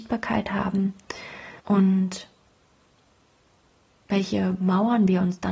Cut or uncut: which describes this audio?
cut